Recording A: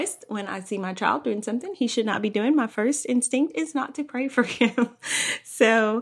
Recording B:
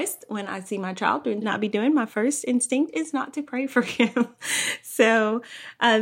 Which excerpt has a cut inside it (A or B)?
B